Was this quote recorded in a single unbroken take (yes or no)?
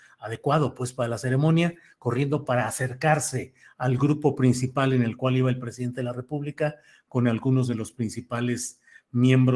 yes